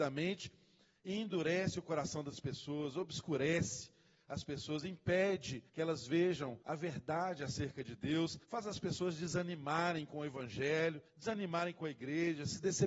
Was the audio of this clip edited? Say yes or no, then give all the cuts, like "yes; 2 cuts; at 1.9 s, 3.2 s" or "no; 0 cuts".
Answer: yes; 4 cuts; at 5.7 s, 6.6 s, 8.4 s, 11.1 s